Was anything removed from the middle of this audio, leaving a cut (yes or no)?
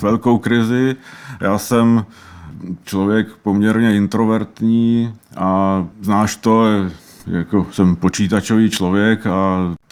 yes